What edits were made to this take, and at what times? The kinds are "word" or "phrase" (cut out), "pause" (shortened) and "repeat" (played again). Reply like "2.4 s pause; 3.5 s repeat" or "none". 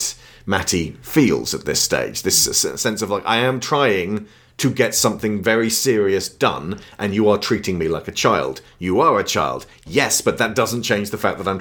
none